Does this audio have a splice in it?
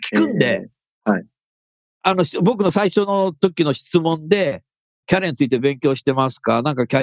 no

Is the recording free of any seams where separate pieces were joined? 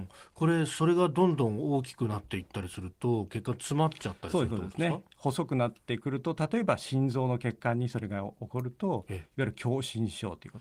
no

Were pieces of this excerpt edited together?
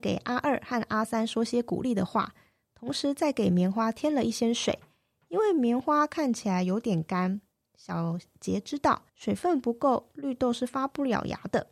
yes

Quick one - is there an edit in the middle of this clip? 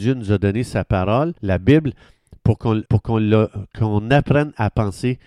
yes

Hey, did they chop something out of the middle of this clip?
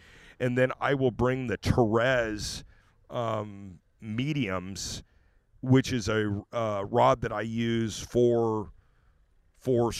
no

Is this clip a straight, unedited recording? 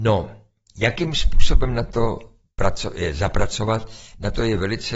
yes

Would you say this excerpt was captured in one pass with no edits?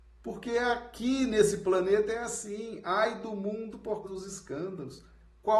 no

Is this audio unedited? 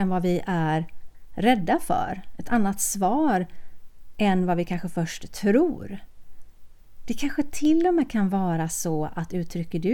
yes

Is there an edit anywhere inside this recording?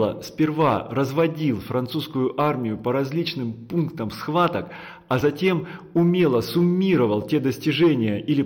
no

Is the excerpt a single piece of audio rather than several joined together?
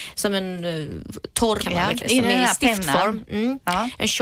no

